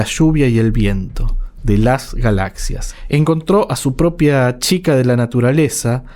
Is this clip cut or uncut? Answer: uncut